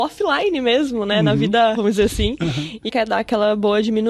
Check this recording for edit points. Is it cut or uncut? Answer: cut